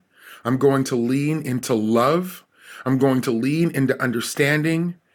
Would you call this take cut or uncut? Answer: uncut